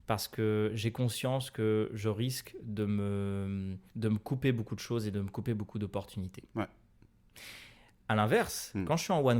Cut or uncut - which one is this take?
cut